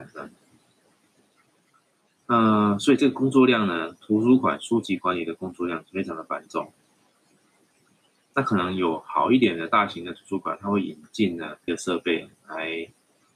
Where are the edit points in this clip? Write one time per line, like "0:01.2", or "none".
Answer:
0:11.7